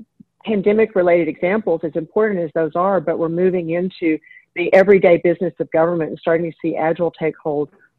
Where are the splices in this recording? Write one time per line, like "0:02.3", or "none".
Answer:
none